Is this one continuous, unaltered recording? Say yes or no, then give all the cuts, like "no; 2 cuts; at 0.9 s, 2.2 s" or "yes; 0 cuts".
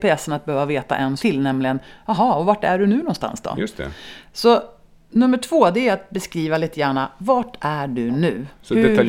no; 1 cut; at 1.2 s